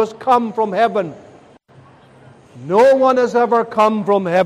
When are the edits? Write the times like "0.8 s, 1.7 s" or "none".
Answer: none